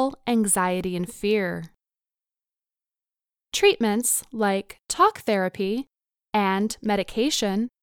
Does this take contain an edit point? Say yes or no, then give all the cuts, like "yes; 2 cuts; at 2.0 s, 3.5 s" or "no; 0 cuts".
no; 0 cuts